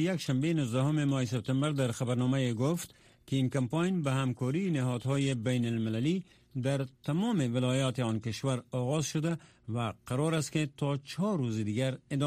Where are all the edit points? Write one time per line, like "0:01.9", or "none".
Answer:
none